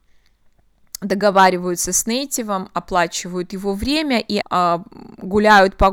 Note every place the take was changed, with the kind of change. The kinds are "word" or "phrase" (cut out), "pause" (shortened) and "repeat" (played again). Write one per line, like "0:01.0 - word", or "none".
0:04.4 - word